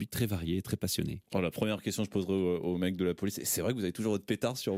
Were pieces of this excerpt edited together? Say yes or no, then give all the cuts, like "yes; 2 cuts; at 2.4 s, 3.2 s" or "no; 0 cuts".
no; 0 cuts